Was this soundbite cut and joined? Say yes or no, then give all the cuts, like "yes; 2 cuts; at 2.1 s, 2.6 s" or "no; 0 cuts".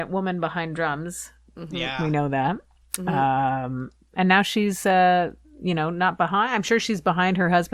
no; 0 cuts